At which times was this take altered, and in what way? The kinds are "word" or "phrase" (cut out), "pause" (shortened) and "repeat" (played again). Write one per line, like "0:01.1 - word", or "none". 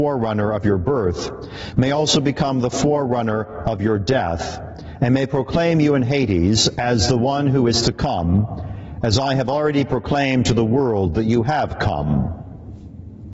none